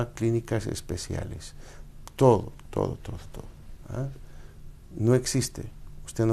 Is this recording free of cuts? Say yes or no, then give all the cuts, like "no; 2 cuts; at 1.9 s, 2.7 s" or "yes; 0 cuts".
yes; 0 cuts